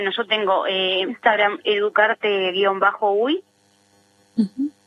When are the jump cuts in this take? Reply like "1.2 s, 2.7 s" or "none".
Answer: 1.1 s, 1.6 s

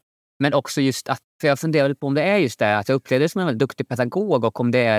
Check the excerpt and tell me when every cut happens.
1.3 s

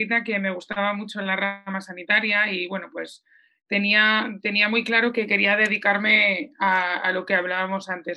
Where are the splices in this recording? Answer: none

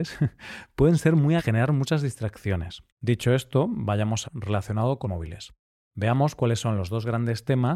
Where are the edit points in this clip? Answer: 1.4 s, 2.9 s, 4.2 s, 5.0 s

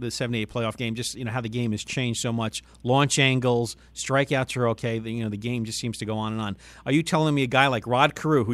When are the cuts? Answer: none

